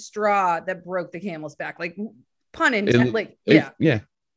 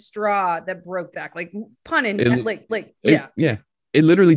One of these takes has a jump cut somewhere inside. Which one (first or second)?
second